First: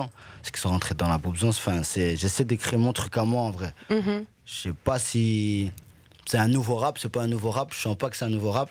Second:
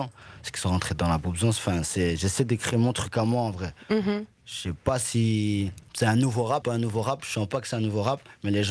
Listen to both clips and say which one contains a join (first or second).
second